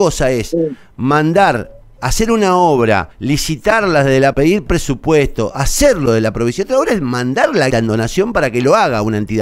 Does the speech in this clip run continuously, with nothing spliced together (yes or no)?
no